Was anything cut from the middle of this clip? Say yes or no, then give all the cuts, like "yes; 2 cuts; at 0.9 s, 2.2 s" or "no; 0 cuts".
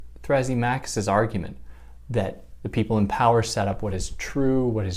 no; 0 cuts